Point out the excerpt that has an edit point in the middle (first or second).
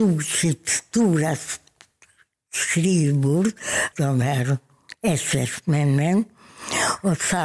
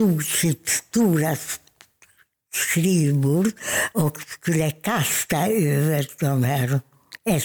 first